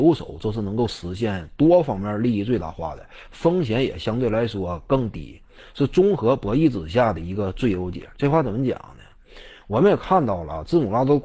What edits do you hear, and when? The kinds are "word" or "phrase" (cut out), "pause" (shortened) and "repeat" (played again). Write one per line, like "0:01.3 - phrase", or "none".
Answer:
none